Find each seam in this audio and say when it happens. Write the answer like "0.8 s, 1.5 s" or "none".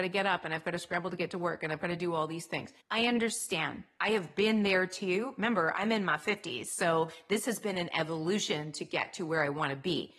2.8 s